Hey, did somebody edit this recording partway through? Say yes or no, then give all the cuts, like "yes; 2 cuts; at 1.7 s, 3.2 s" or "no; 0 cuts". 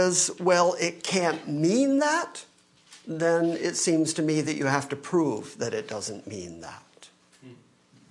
no; 0 cuts